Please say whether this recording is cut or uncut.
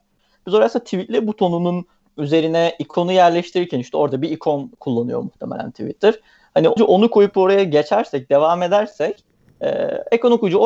cut